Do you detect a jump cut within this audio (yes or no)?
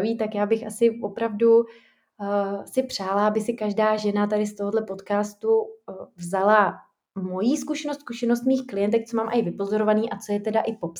no